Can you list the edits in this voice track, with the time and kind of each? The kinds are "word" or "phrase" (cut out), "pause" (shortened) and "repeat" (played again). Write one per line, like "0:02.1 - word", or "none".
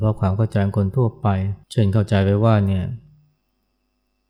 0:01.6 - pause